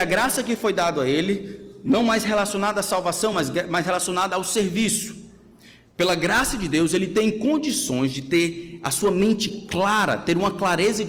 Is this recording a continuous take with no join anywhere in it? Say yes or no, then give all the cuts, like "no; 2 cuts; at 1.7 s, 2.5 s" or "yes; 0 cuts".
yes; 0 cuts